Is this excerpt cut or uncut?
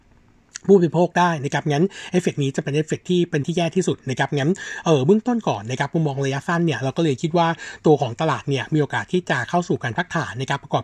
cut